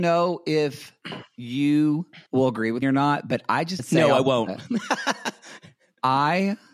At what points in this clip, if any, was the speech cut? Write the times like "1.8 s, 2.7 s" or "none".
2.3 s, 2.8 s, 3.8 s